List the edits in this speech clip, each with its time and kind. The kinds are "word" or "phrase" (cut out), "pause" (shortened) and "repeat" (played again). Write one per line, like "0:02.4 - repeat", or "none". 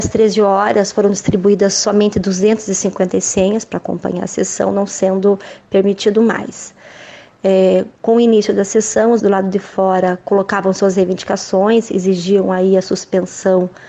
0:08.0 - pause
0:09.2 - word